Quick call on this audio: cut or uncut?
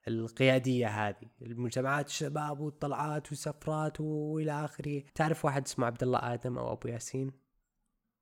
cut